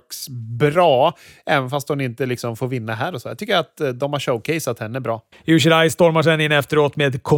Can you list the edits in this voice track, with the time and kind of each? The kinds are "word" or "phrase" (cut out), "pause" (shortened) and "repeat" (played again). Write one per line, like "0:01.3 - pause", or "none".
0:05.3 - pause